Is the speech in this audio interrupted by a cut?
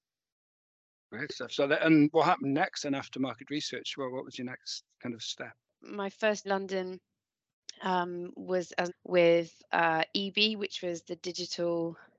yes; 2 cuts; at 6.4 s, 8.9 s

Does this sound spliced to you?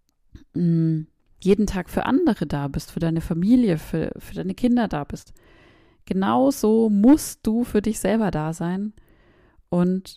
no; 0 cuts

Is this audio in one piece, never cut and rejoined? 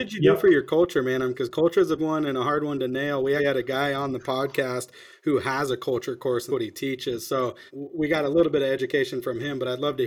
no; 5 cuts; at 1.3 s, 2.0 s, 3.4 s, 6.5 s, 7.7 s

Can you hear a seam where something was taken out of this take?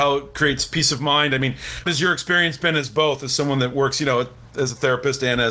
yes; 1 cut; at 1.9 s

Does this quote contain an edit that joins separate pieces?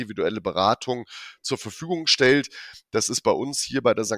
no; 0 cuts

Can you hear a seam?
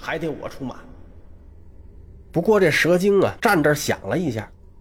yes; 1 cut; at 3.4 s

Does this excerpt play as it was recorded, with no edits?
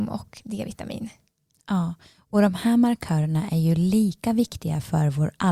yes; 0 cuts

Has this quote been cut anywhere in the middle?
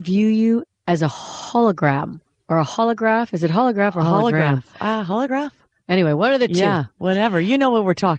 no; 0 cuts

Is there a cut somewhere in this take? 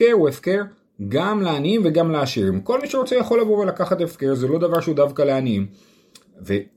no; 0 cuts

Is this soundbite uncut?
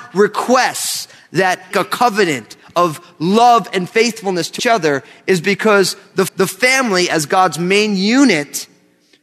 no; 4 cuts; at 1.7 s, 2.7 s, 4.6 s, 6.3 s

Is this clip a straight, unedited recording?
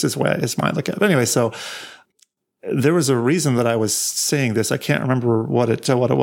yes; 0 cuts

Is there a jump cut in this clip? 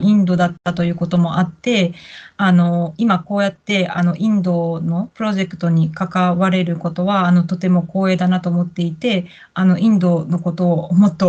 no; 0 cuts

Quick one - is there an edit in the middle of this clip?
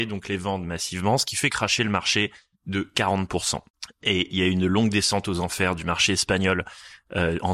yes; 1 cut; at 2.5 s

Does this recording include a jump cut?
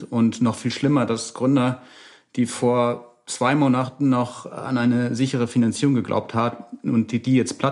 no; 0 cuts

